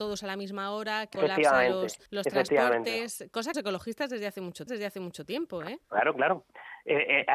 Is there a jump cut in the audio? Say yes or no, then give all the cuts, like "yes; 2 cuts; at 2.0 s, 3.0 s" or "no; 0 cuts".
yes; 5 cuts; at 1.1 s, 2.1 s, 3.5 s, 4.7 s, 5.8 s